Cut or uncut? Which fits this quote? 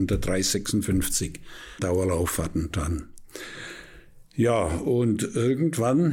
cut